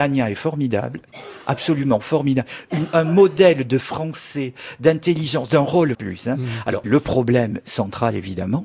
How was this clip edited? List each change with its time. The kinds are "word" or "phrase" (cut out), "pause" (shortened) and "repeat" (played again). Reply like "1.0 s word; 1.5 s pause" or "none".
3.8 s phrase; 5.9 s phrase; 6.8 s word